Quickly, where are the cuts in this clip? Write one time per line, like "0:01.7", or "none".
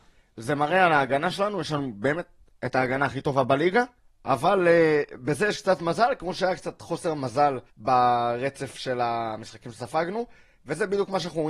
0:04.0
0:07.7